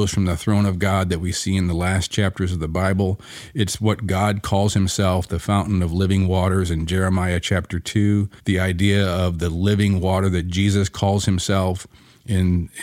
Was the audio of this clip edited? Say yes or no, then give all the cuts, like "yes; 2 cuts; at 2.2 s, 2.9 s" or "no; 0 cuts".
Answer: yes; 1 cut; at 8.4 s